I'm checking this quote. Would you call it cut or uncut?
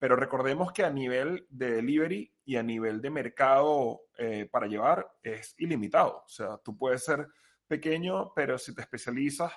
uncut